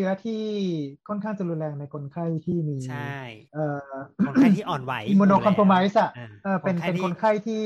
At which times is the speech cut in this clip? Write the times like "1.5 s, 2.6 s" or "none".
3.4 s